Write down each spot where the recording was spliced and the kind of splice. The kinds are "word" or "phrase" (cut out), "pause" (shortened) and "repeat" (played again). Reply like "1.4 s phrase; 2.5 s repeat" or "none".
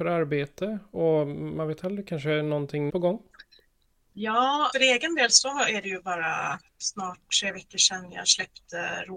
2.9 s word; 4.7 s word; 6.7 s pause